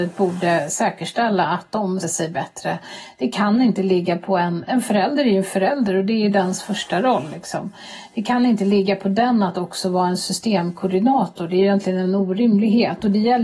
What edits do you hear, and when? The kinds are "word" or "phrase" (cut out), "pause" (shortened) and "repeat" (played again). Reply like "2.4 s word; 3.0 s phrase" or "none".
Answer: 2.0 s word; 4.7 s word